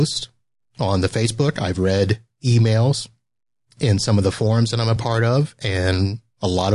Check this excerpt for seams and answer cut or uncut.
uncut